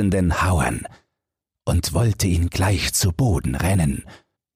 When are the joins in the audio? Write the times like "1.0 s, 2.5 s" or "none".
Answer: none